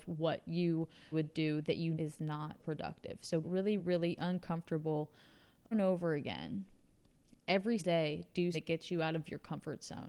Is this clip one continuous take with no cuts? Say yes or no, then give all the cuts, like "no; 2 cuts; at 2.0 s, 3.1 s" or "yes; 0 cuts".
no; 8 cuts; at 1.1 s, 1.9 s, 2.6 s, 3.4 s, 3.8 s, 5.7 s, 7.8 s, 8.5 s